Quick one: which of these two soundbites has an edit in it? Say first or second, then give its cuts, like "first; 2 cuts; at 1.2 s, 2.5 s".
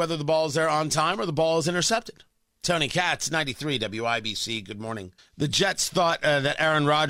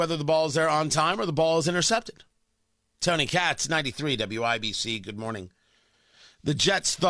first; 2 cuts; at 2.5 s, 5.2 s